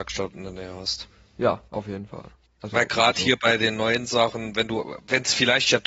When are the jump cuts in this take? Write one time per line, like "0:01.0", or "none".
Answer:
none